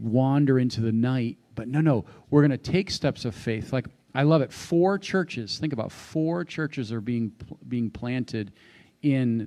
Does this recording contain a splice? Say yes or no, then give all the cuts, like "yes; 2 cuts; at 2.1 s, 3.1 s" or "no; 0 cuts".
no; 0 cuts